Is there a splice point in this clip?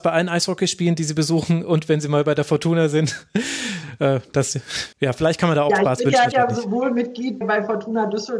yes; 3 cuts; at 4.9 s, 6.3 s, 7.4 s

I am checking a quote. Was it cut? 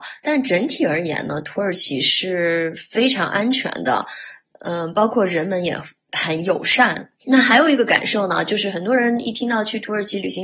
yes; 1 cut; at 7.2 s

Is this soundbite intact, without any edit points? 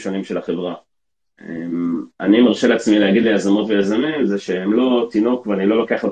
yes; 0 cuts

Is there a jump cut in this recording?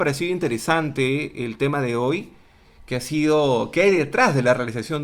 no; 0 cuts

